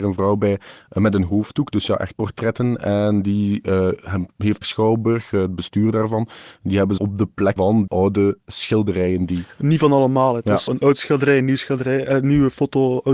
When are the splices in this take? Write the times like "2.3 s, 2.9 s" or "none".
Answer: 2.1 s, 4.6 s, 7.0 s, 7.6 s, 7.9 s, 10.7 s